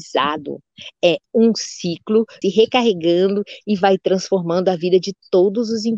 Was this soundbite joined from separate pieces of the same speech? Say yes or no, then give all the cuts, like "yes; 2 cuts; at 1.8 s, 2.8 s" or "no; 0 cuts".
yes; 1 cut; at 2.4 s